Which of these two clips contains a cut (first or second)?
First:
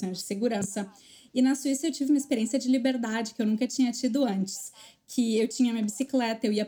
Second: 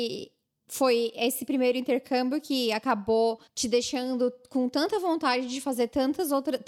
second